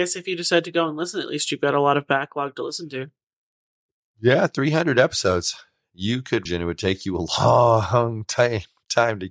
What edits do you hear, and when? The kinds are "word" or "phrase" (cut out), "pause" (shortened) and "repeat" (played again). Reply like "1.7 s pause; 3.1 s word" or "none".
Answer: 6.5 s phrase